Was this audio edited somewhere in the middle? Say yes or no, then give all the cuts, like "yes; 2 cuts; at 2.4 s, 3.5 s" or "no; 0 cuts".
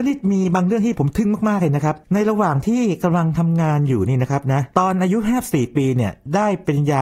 yes; 1 cut; at 2.0 s